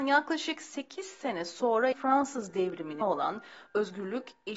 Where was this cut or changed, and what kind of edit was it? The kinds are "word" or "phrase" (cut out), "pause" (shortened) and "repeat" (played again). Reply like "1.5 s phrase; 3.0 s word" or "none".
1.9 s word; 3.0 s word